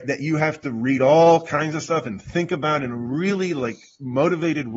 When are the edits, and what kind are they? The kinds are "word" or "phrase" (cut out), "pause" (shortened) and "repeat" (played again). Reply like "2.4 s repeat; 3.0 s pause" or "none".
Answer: none